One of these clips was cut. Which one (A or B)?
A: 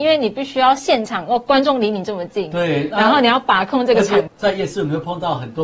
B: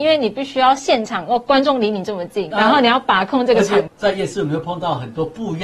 B